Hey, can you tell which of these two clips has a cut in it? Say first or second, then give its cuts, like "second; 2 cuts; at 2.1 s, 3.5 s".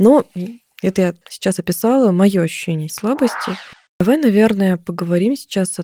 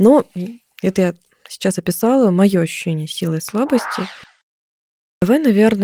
first; 3 cuts; at 1.2 s, 2.9 s, 3.9 s